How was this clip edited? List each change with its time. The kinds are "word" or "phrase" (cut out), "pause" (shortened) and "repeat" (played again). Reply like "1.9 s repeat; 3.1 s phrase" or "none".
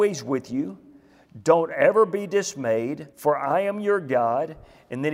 3.1 s pause